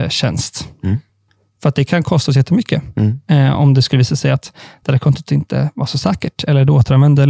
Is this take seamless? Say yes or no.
yes